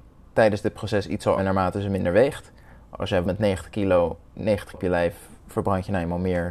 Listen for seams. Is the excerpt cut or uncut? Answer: cut